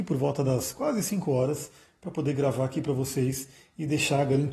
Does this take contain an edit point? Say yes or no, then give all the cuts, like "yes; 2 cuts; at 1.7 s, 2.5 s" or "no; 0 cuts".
no; 0 cuts